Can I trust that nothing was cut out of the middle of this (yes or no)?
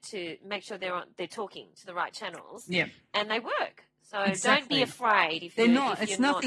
yes